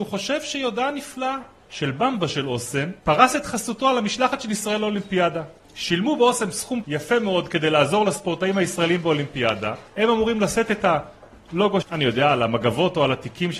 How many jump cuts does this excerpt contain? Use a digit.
5